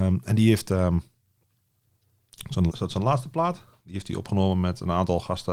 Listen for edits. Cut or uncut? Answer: cut